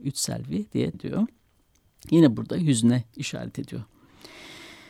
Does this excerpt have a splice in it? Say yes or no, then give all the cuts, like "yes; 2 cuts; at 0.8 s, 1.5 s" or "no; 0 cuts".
yes; 1 cut; at 0.9 s